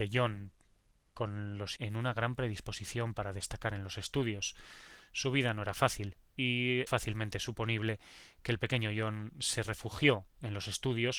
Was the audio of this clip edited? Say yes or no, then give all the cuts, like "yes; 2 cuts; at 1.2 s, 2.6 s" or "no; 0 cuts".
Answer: yes; 2 cuts; at 1.8 s, 6.9 s